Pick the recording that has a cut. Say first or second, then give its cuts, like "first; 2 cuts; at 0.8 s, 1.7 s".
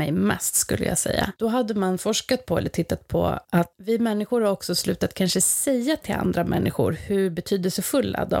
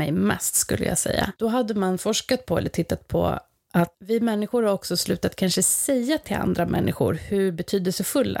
first; 1 cut; at 3.4 s